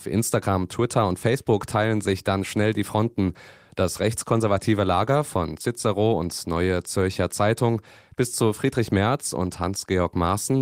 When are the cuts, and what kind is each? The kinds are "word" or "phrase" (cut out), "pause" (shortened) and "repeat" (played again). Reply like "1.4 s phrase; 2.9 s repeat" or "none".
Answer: none